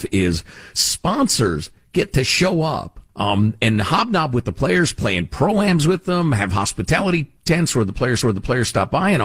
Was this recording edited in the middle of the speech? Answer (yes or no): yes